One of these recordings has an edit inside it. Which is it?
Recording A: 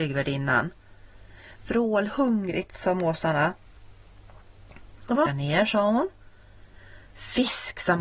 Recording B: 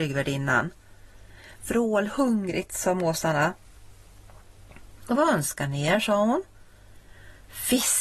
A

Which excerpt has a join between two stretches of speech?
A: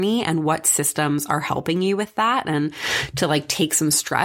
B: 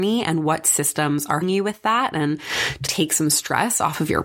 B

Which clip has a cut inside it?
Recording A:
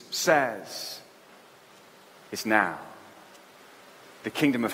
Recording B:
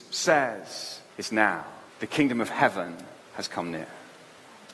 B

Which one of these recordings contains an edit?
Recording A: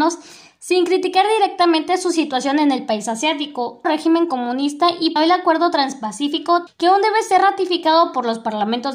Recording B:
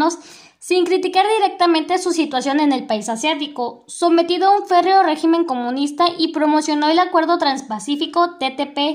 A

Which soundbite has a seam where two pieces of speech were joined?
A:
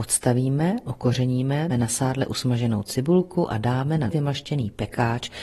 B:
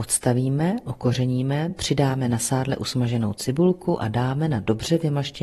A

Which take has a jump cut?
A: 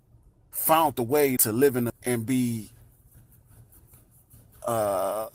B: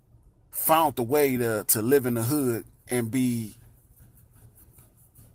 A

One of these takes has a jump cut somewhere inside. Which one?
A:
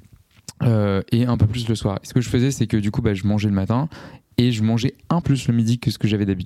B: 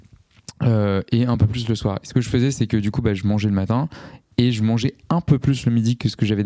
A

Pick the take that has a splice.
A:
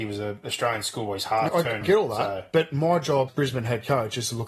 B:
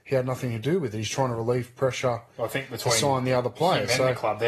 A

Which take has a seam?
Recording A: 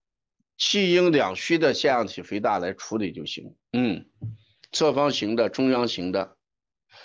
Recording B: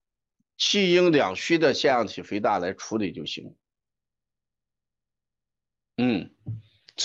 A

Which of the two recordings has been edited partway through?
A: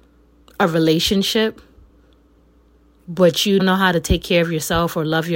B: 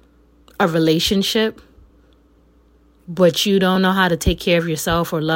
A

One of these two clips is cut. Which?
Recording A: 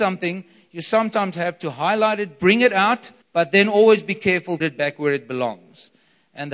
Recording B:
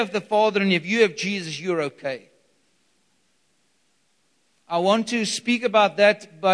A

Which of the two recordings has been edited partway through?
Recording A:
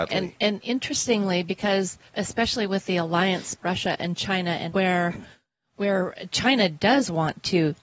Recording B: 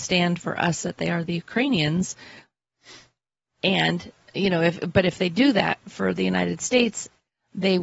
A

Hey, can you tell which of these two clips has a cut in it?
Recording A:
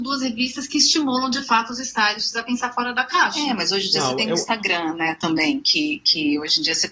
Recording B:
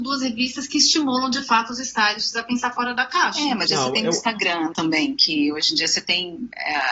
B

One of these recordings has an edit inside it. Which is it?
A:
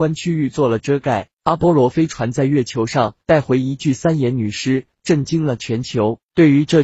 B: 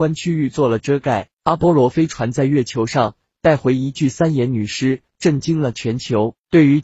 A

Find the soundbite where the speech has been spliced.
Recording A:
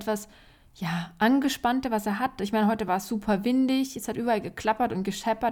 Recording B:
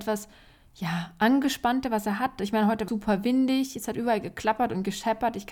B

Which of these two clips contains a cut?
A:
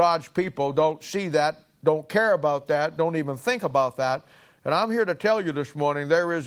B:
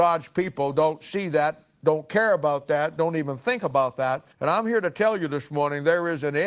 B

